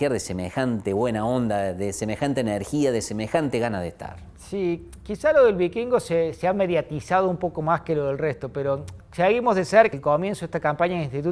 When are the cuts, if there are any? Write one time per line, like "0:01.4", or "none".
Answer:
0:09.0
0:09.9

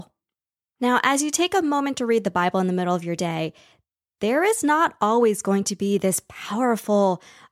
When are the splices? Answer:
none

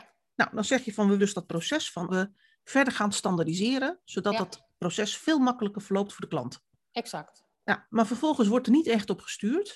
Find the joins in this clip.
0:01.2
0:02.1
0:07.5

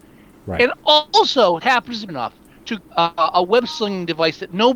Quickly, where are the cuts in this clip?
0:01.6
0:02.1
0:02.8

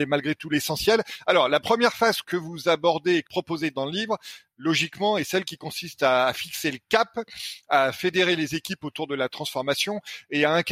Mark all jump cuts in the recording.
0:02.2
0:03.3

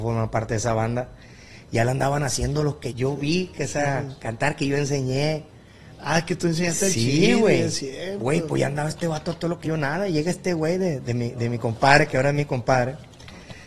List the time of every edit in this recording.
0:02.9
0:09.6

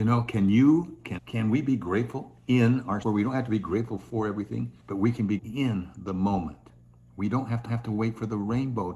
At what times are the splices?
0:01.2
0:03.0
0:04.8
0:05.4
0:07.7

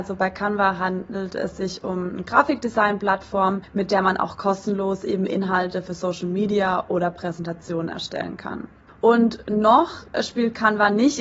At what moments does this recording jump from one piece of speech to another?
0:08.8

